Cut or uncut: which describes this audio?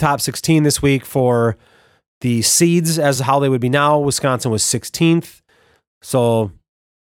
uncut